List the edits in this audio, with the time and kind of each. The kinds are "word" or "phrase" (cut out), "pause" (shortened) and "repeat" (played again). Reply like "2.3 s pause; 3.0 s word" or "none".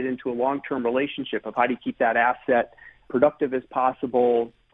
3.1 s word